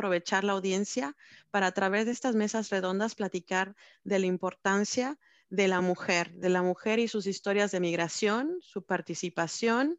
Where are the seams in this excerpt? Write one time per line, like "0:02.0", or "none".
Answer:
none